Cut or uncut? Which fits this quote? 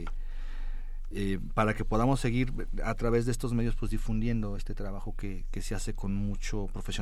uncut